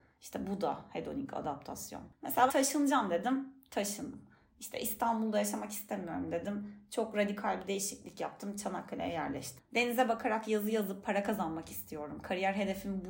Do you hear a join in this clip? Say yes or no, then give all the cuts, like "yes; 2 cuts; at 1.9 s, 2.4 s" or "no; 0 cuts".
yes; 1 cut; at 2.5 s